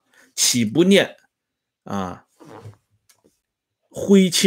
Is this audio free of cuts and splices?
yes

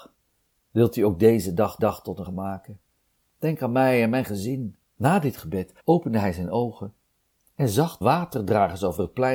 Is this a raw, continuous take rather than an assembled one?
no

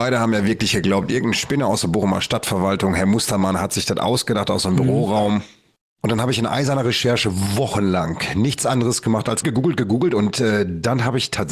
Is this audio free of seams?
no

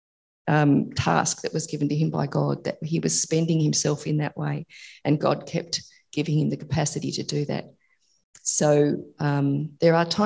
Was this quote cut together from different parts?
no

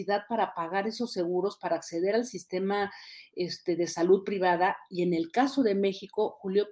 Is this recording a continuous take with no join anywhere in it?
yes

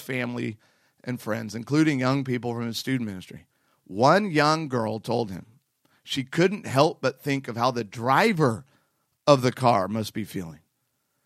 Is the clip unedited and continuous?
yes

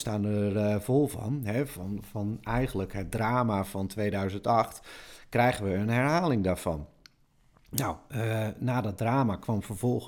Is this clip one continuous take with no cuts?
yes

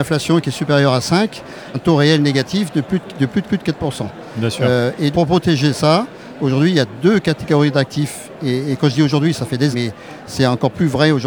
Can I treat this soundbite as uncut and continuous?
no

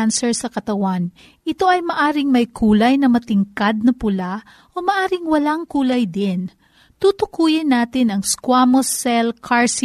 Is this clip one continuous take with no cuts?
yes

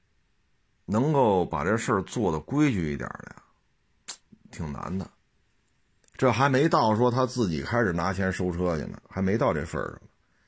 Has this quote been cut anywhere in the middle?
no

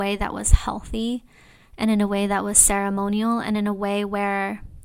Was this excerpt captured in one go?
yes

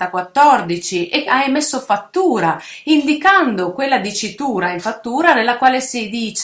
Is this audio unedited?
no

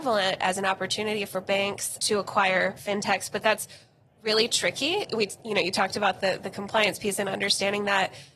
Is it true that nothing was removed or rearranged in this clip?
no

